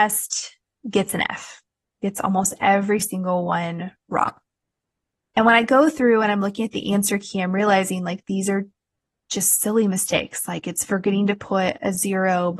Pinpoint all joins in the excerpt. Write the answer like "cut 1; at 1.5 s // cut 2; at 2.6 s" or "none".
none